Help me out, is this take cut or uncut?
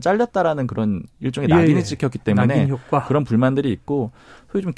uncut